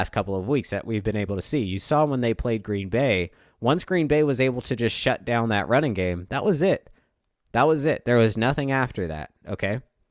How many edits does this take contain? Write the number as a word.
zero